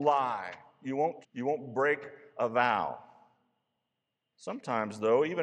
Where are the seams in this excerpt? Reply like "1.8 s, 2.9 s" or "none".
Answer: 1.2 s